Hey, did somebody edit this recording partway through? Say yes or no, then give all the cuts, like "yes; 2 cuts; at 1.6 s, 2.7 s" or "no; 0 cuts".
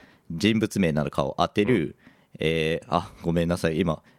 no; 0 cuts